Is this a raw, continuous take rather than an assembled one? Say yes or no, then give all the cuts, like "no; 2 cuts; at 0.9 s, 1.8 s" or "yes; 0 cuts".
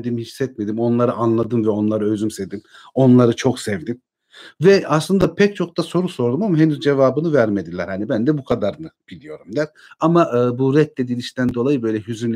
yes; 0 cuts